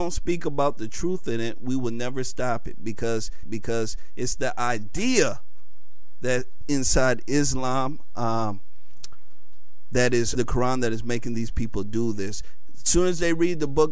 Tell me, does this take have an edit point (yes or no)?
yes